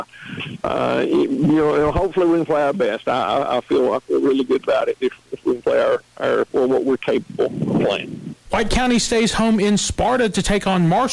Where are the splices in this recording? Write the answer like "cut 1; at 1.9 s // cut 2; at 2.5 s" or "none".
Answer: none